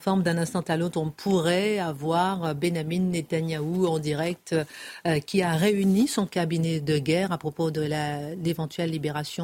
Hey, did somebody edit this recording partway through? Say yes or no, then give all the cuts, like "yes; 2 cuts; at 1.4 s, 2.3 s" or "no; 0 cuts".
no; 0 cuts